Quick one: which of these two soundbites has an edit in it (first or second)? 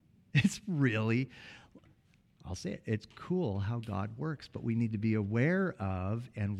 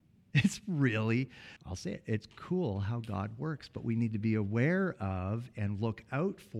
second